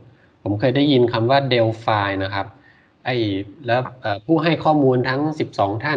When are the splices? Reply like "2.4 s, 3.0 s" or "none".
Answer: none